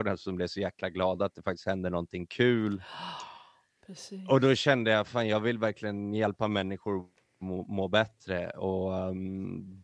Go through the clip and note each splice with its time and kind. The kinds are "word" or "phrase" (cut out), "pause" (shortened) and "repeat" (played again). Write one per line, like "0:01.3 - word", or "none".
none